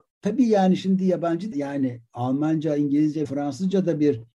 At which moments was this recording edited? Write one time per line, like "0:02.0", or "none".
0:01.5
0:03.2